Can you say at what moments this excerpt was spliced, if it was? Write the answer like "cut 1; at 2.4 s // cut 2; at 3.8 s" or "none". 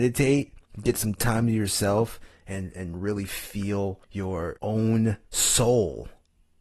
cut 1; at 4.0 s // cut 2; at 5.2 s